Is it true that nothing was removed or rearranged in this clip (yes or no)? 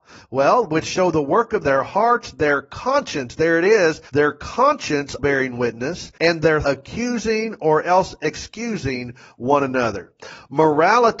no